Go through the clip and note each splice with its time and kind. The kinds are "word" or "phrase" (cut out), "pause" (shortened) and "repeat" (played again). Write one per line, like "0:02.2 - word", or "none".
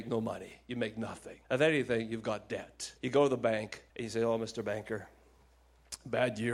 0:01.4 - pause
0:03.0 - pause
0:03.9 - pause